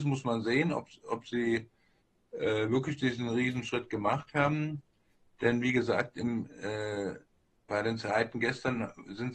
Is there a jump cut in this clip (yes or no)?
no